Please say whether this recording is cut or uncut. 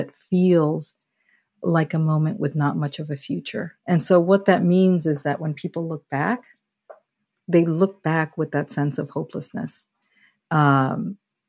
cut